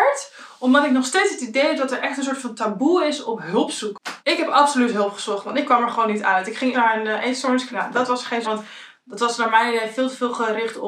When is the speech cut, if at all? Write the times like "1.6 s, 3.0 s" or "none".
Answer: 4.2 s, 6.7 s, 7.7 s, 8.4 s